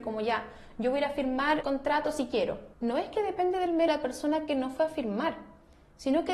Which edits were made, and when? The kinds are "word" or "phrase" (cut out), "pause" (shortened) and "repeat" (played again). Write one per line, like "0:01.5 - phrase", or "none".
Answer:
0:01.6 - word
0:02.7 - pause
0:03.9 - phrase